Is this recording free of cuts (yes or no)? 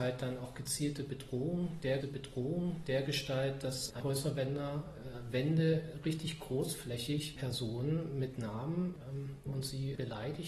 no